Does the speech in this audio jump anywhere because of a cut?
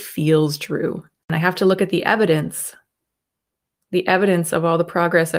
no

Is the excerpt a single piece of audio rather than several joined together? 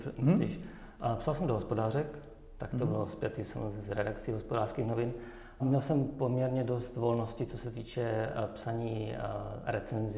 no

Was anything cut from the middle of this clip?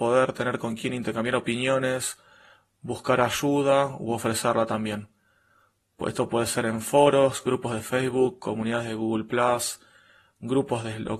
no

